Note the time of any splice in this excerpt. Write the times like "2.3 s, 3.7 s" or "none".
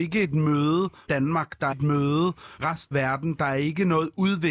1.1 s, 1.7 s, 2.6 s, 2.9 s